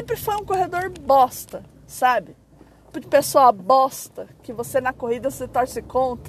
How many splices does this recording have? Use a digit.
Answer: 1